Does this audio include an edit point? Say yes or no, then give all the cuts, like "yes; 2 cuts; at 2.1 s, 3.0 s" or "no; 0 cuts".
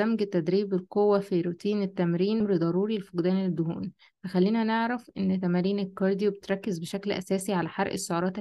no; 0 cuts